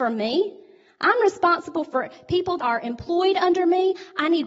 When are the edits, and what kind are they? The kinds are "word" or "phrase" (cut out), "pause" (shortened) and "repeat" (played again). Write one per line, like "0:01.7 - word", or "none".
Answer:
0:02.6 - word